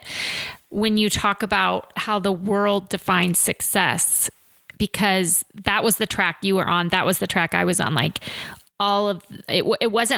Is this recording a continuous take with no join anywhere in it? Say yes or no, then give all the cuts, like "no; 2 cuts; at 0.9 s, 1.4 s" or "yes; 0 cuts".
yes; 0 cuts